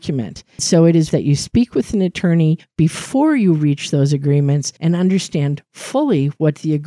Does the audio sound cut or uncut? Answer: cut